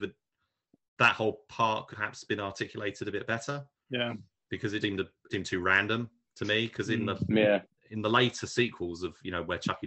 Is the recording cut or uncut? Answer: cut